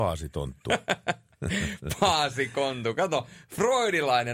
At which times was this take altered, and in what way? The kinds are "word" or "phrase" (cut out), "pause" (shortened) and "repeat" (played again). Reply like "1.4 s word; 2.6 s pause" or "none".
none